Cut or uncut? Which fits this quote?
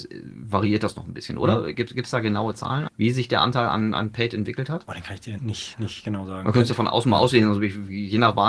cut